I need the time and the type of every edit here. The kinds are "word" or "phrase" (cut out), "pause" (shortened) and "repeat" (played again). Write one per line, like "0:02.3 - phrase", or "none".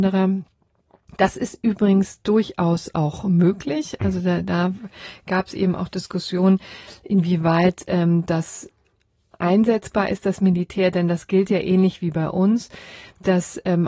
none